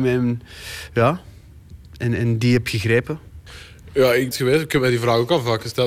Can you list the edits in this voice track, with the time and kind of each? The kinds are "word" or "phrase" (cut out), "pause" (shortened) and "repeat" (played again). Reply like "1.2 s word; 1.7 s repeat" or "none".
4.3 s phrase